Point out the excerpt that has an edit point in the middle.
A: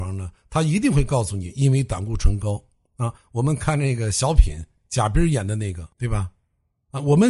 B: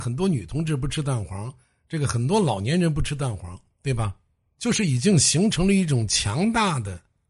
A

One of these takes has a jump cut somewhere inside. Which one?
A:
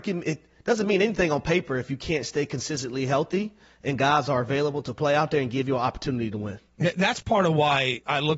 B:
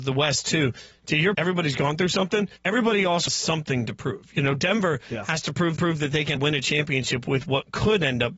B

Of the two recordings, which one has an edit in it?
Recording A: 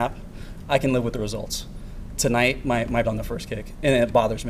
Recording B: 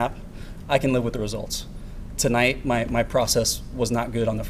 A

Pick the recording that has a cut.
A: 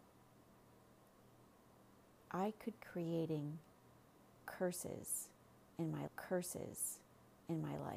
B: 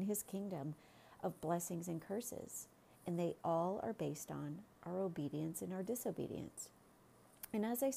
A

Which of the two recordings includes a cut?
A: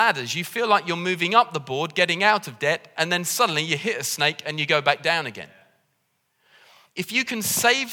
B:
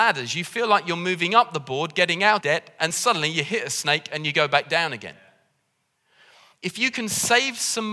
B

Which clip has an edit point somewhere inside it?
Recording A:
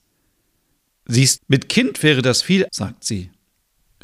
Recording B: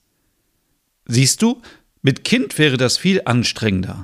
A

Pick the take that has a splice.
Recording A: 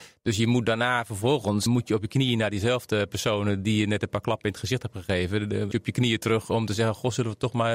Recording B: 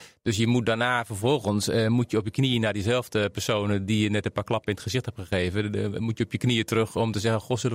A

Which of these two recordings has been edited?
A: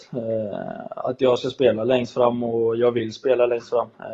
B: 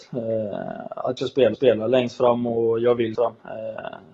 B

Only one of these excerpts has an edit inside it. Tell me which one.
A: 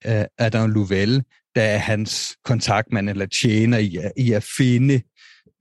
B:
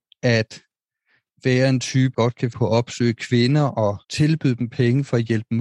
B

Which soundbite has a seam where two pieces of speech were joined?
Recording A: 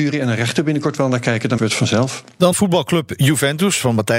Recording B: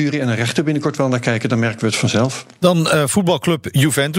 A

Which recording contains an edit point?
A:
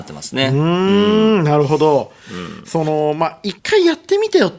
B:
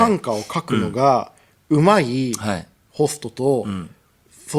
A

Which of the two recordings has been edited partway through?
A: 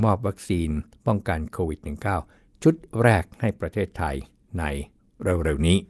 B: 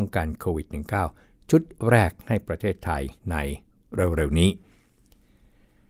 B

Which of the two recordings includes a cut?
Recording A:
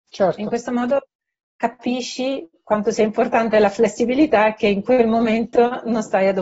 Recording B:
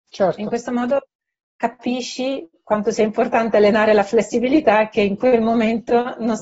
A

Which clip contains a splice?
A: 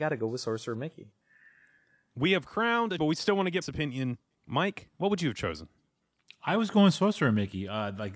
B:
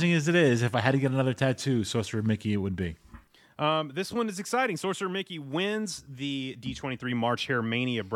A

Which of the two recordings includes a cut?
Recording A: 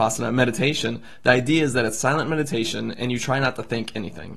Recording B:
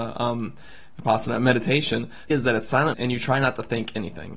B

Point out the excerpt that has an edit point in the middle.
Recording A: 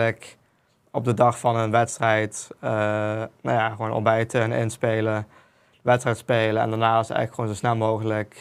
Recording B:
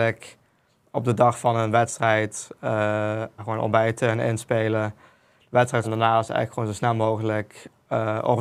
B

